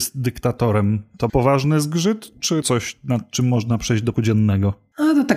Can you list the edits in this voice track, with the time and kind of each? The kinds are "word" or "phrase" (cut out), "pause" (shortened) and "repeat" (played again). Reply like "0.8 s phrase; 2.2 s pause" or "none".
1.3 s word; 2.6 s word; 4.1 s word